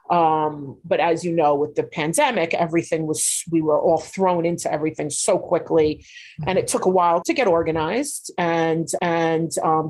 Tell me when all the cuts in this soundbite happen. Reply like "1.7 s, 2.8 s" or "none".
7.2 s, 9.0 s